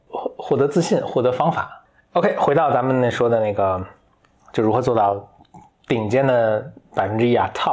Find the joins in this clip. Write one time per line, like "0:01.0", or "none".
none